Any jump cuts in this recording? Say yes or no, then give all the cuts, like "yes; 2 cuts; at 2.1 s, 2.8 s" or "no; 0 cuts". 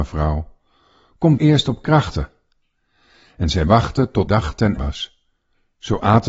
yes; 4 cuts; at 1.4 s, 3.7 s, 4.3 s, 4.8 s